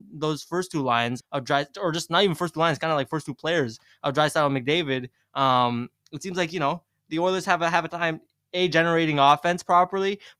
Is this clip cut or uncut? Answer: cut